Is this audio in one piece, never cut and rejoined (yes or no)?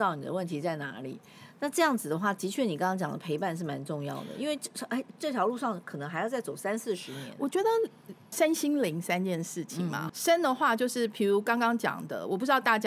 no